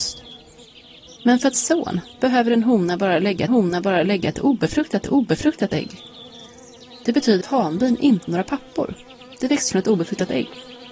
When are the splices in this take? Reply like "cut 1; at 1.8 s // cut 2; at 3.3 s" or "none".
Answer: cut 1; at 1.2 s // cut 2; at 1.5 s // cut 3; at 3.5 s // cut 4; at 5.0 s // cut 5; at 7.4 s // cut 6; at 8.3 s // cut 7; at 9.7 s